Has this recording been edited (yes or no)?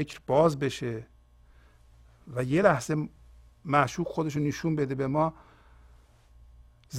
no